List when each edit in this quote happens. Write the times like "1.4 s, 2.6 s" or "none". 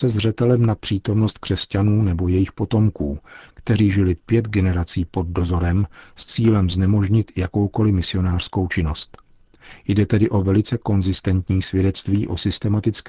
none

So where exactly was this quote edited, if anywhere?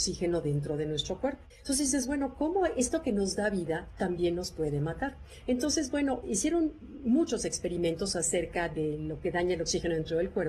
1.5 s

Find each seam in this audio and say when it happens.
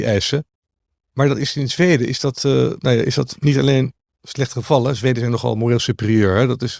none

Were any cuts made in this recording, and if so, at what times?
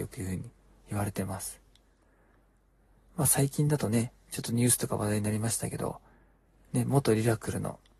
none

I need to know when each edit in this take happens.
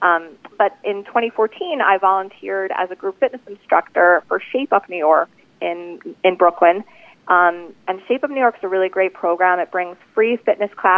none

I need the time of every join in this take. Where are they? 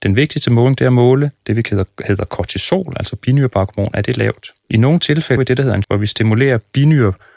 4.6 s, 5.4 s, 5.8 s

